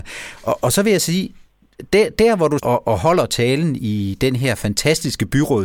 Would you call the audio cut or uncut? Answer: cut